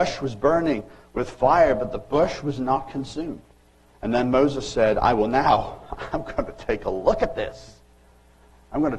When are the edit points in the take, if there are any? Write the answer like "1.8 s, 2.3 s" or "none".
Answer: none